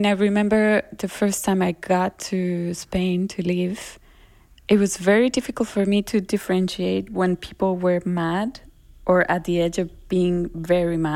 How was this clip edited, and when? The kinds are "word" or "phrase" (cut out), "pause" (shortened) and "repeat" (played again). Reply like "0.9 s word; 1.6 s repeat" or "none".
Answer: none